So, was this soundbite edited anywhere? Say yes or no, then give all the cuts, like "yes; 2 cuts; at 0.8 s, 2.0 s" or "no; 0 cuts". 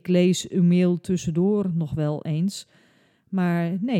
no; 0 cuts